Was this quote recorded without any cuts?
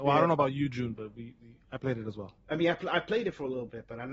yes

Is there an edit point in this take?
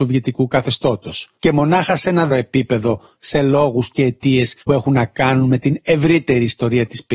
yes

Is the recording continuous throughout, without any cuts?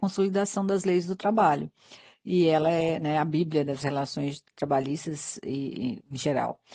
yes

